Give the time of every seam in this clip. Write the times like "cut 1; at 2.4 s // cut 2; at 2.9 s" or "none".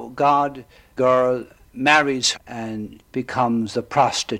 cut 1; at 1.0 s // cut 2; at 2.3 s // cut 3; at 3.0 s